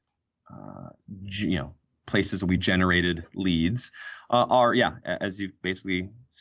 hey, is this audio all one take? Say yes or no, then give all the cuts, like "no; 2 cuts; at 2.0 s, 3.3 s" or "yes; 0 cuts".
yes; 0 cuts